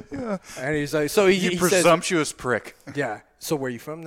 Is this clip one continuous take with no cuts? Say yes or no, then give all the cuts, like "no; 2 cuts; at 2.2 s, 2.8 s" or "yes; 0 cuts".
yes; 0 cuts